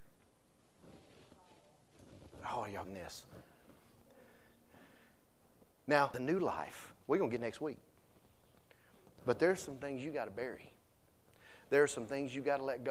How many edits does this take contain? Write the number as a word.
three